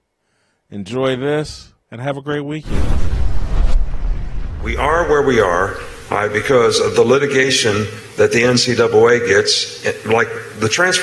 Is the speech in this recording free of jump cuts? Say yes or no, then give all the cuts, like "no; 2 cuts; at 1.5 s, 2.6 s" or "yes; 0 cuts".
no; 1 cut; at 1.8 s